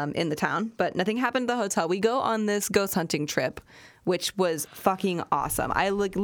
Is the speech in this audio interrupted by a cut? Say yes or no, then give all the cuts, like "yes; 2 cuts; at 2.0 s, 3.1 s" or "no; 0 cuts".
no; 0 cuts